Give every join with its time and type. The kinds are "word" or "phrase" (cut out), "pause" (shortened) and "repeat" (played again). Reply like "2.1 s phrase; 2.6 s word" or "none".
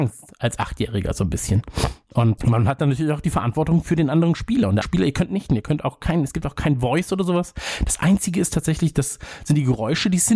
2.4 s word; 4.8 s word; 5.5 s word